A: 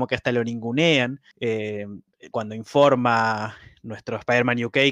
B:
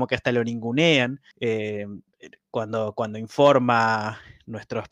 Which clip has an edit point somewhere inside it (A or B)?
A